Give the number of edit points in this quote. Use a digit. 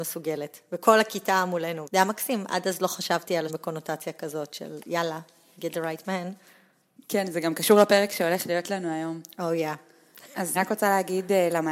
3